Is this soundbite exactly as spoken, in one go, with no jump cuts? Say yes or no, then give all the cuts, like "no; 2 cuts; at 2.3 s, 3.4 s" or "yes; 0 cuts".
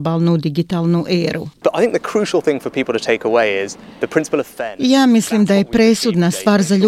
no; 1 cut; at 1.5 s